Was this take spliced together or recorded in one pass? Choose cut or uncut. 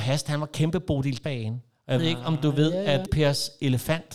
cut